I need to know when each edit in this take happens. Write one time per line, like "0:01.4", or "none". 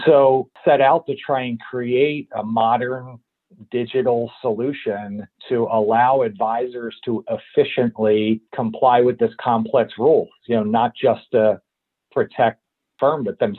0:05.3
0:08.5